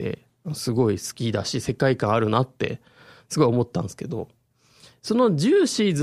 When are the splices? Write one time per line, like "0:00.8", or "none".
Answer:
none